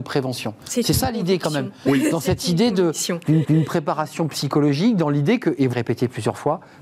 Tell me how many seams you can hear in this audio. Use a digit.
2